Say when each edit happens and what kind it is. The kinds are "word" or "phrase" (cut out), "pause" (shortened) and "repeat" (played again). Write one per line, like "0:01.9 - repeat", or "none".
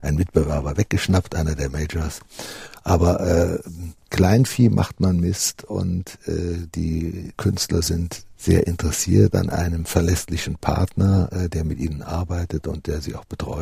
0:04.1 - phrase
0:07.3 - word
0:08.3 - word